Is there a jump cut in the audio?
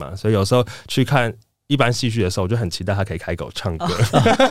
no; 0 cuts

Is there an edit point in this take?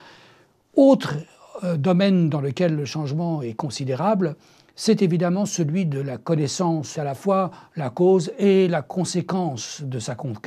yes; 1 cut; at 6.9 s

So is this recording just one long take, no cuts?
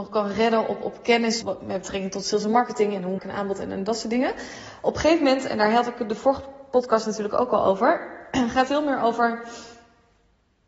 no; 3 cuts; at 1.4 s, 3.2 s, 8.7 s

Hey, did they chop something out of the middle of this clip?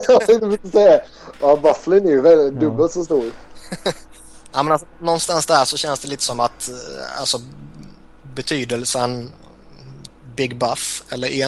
no; 0 cuts

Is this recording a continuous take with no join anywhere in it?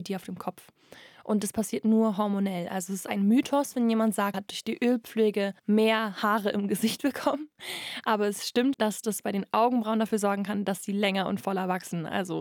no; 3 cuts; at 4.3 s, 5.6 s, 8.7 s

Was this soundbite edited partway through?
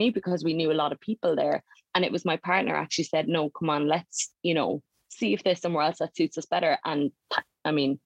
no; 0 cuts

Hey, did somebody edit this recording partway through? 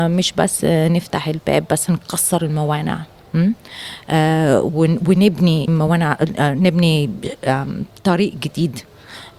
yes; 1 cut; at 5.7 s

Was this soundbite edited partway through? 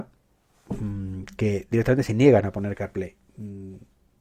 no; 0 cuts

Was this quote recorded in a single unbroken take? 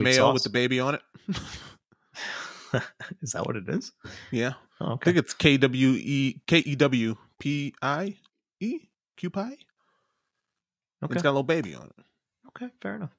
no; 1 cut; at 4.7 s

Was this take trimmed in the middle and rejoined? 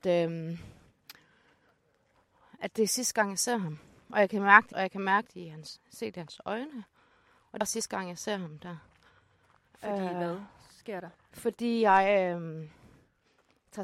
yes; 2 cuts; at 4.7 s, 7.6 s

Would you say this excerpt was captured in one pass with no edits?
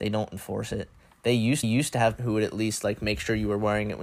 no; 2 cuts; at 1.6 s, 2.2 s

